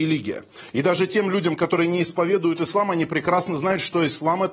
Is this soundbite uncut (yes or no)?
yes